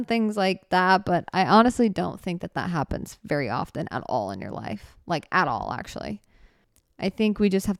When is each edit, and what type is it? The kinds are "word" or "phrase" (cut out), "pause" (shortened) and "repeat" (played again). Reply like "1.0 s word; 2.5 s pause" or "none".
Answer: none